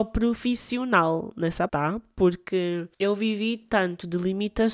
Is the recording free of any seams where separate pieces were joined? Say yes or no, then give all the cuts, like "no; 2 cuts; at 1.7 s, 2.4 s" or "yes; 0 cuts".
no; 2 cuts; at 1.7 s, 2.9 s